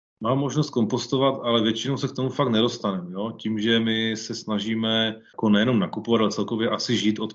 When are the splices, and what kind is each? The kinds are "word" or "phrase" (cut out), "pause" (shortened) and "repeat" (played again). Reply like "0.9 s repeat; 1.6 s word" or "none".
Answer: none